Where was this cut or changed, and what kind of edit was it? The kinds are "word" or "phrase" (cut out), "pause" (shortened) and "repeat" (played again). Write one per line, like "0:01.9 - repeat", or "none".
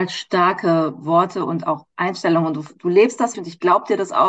0:03.3 - word

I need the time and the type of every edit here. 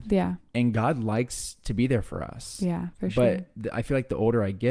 none

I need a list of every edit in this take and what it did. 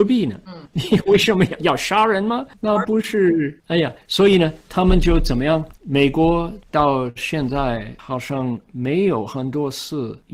0:05.8 - pause

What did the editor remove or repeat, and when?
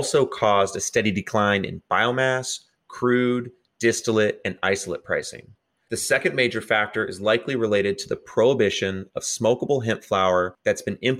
none

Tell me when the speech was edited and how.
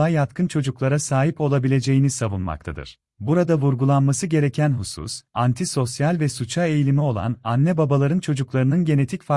0:03.1 - pause

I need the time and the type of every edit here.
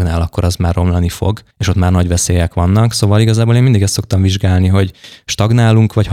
0:01.5 - pause

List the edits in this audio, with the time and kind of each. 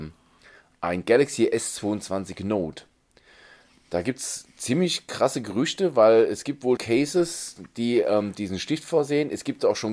0:06.8 - word

